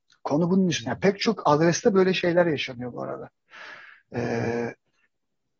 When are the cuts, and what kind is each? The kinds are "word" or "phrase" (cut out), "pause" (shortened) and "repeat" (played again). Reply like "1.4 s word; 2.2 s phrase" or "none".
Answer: none